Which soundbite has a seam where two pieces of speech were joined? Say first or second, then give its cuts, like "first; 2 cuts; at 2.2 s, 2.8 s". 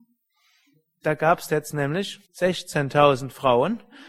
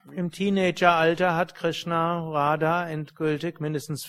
first; 1 cut; at 2.2 s